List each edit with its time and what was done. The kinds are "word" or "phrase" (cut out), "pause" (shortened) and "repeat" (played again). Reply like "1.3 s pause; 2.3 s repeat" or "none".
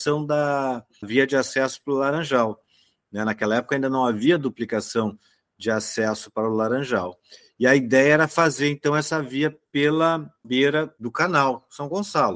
none